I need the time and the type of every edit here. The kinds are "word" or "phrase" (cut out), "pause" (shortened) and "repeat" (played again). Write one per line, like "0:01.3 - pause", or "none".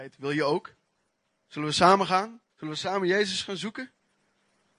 0:01.1 - pause
0:02.5 - pause